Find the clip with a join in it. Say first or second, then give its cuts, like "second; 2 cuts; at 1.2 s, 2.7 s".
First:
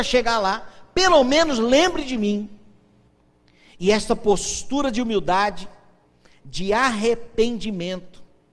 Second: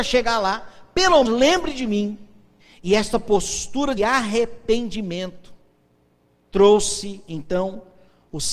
second; 3 cuts; at 1.2 s, 2.6 s, 4.0 s